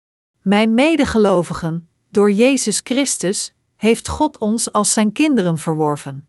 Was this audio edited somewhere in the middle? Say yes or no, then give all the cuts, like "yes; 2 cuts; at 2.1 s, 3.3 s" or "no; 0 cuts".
no; 0 cuts